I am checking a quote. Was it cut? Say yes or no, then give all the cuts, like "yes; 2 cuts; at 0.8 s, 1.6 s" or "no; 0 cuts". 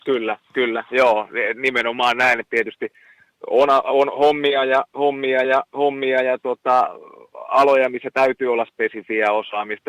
yes; 1 cut; at 5.4 s